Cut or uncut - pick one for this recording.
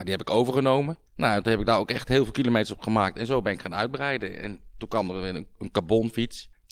cut